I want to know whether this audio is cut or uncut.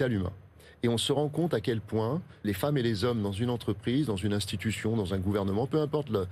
cut